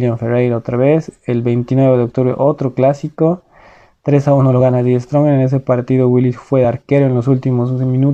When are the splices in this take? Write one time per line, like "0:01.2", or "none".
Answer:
none